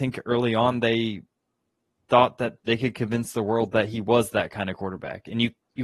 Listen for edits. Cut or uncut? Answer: cut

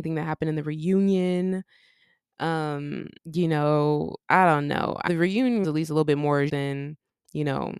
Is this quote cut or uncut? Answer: cut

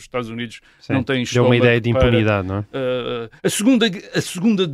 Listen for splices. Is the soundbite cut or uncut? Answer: cut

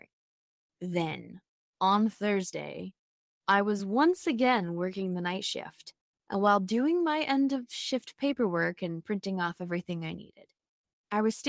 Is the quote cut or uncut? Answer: uncut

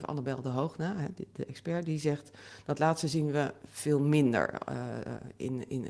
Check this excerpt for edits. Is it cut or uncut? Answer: uncut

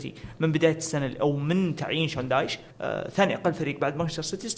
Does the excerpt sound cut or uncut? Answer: cut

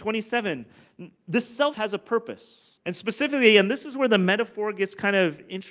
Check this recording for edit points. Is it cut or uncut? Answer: cut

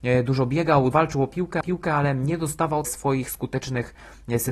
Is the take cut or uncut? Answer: cut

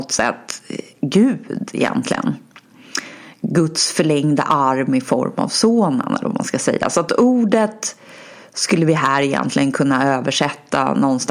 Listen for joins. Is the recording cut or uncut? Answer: uncut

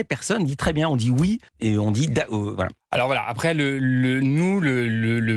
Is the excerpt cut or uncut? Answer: cut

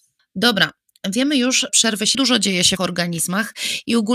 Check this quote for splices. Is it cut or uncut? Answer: cut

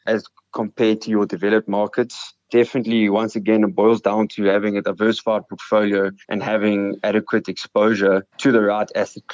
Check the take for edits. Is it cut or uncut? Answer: cut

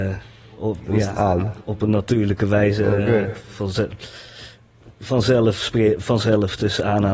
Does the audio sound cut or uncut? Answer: uncut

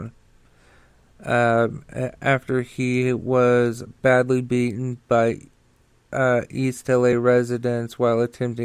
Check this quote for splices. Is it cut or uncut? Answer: uncut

